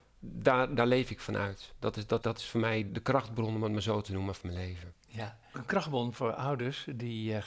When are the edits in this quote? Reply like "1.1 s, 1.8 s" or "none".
2.2 s, 2.9 s, 5.5 s